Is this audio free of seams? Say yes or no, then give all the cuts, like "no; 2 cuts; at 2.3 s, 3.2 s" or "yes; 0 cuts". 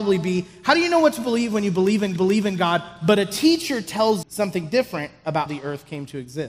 no; 3 cuts; at 2.2 s, 4.2 s, 5.5 s